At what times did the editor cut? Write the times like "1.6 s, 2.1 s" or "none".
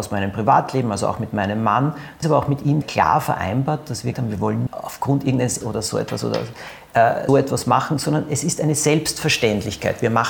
2.2 s, 2.8 s, 4.1 s, 4.7 s, 5.6 s, 7.3 s